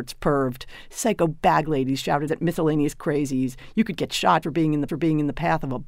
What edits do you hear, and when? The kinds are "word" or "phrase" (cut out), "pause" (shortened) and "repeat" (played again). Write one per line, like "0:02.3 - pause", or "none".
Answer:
0:02.3 - word
0:04.4 - word
0:04.9 - repeat

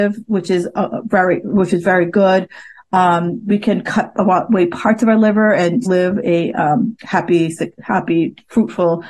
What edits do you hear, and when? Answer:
0:05.9 - word

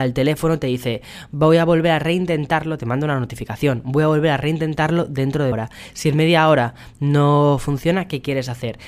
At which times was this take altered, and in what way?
0:05.5 - word

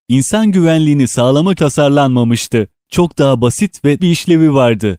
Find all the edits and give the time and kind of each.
0:01.6 - word
0:04.0 - word

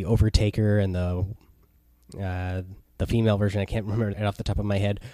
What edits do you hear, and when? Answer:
0:02.8 - pause
0:04.1 - phrase

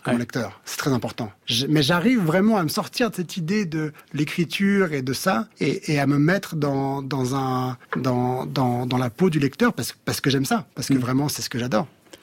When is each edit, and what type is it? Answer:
0:04.0 - pause
0:05.5 - pause
0:07.8 - pause

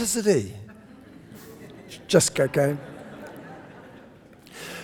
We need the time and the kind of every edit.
0:02.3 - phrase

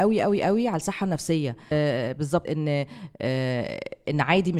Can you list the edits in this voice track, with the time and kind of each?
0:01.7 - word
0:02.5 - word

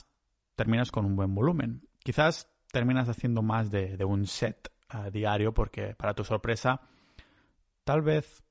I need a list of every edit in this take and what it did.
none

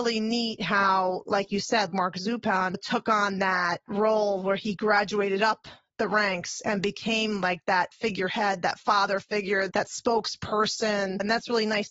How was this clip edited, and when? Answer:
0:01.9 - word

